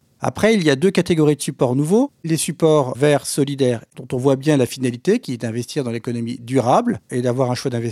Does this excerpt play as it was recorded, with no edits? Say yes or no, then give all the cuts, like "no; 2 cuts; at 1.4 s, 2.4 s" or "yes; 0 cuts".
no; 1 cut; at 3.9 s